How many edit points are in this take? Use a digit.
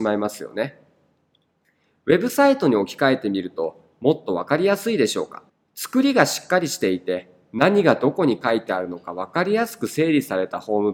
1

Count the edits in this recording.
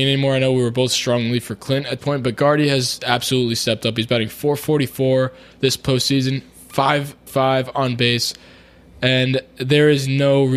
2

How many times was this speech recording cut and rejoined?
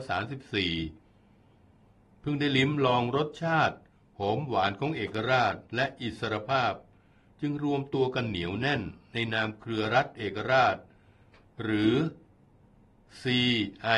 1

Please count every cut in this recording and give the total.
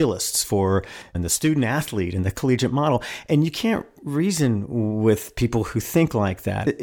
1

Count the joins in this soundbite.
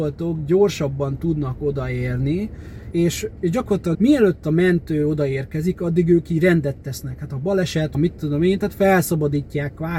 4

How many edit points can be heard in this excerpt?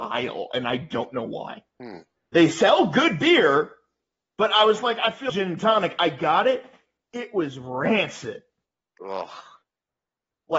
2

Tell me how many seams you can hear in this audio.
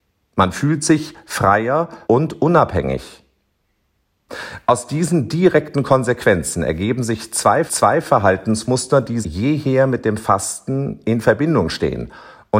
3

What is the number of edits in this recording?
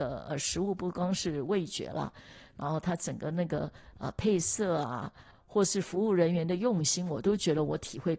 1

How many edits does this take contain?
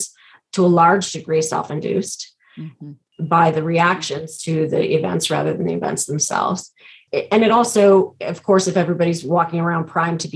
0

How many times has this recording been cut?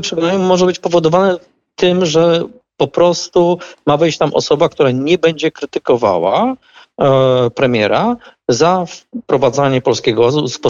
0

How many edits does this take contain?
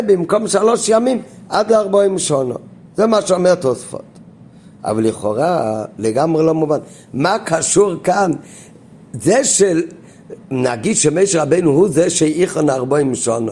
0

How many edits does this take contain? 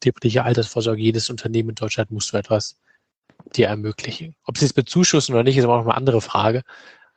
0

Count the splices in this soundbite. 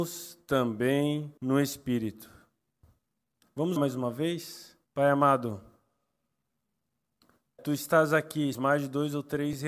5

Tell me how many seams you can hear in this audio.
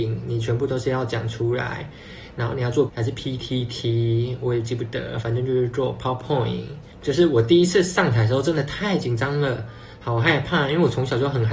1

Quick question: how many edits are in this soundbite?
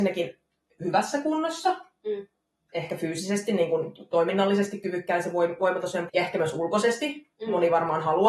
1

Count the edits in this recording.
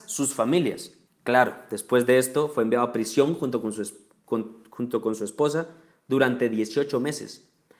1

